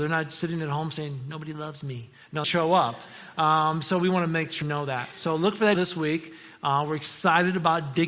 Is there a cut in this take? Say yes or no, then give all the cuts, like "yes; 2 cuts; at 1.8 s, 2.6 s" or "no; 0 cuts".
yes; 3 cuts; at 2.4 s, 4.6 s, 5.7 s